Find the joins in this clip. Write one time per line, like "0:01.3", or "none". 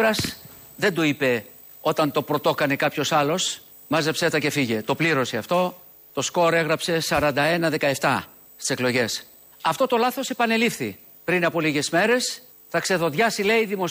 none

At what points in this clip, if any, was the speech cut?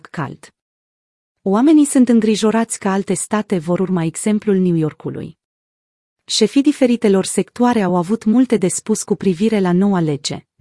none

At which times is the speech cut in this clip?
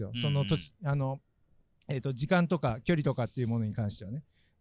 none

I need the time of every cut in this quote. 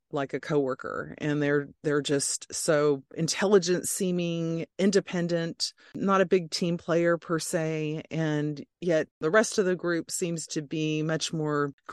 0:04.7

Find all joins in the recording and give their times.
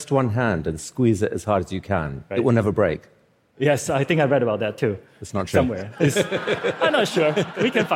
none

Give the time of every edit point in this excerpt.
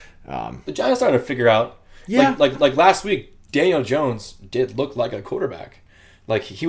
0:02.5
0:05.2

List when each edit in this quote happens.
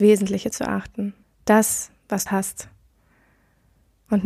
0:01.2
0:02.3

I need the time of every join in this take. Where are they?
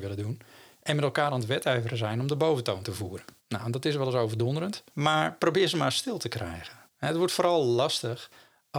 0:03.4
0:04.9
0:06.9

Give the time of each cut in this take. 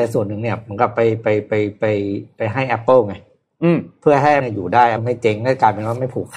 0:04.4
0:05.0

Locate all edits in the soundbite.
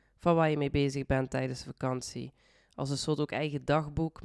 none

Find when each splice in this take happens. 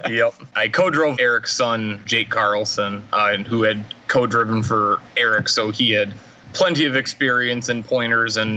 0:01.2

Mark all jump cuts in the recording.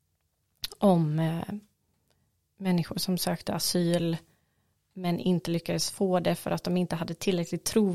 none

